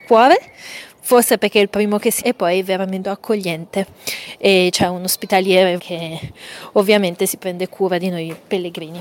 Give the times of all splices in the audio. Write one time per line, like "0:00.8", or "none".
0:02.2
0:03.0
0:05.8